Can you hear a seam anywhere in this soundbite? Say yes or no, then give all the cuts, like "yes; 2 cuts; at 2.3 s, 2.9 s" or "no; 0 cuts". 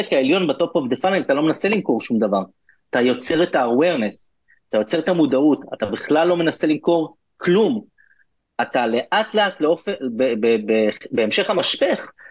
no; 0 cuts